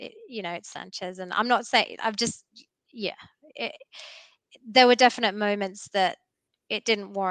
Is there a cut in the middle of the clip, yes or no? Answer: no